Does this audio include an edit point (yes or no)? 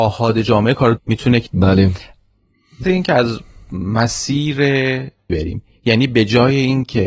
yes